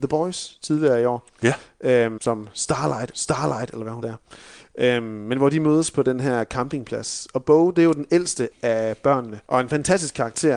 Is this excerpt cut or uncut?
cut